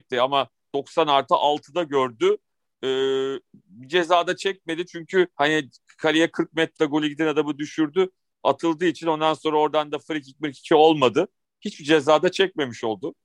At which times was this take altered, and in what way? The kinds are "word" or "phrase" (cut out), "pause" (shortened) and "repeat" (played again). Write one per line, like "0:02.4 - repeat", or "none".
0:05.3 - pause
0:06.8 - word
0:10.7 - word